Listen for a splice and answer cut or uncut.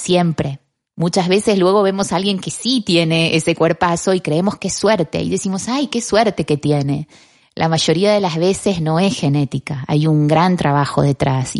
uncut